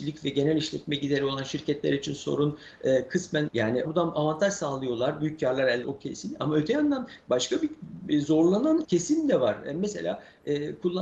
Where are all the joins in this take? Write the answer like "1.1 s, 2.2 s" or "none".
3.5 s, 3.8 s, 5.8 s, 8.8 s